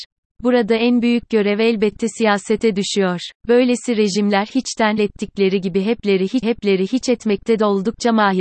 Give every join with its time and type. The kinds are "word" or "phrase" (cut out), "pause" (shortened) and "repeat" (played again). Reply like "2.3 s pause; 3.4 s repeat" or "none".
3.4 s pause; 5.0 s phrase; 6.4 s repeat